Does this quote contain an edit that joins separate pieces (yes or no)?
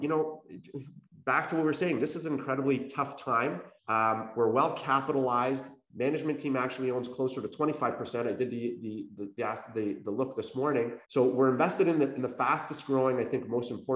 yes